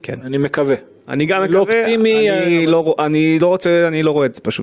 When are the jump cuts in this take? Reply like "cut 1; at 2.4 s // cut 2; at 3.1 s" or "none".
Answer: none